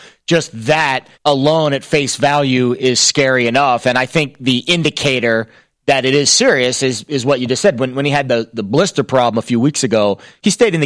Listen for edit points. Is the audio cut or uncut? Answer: cut